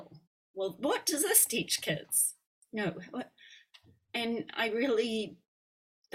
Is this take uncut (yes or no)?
yes